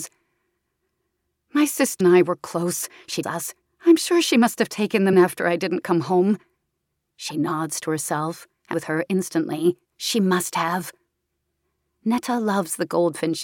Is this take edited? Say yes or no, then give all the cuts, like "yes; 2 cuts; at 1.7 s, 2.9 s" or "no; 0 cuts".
yes; 6 cuts; at 2.0 s, 3.2 s, 3.6 s, 5.1 s, 8.7 s, 9.8 s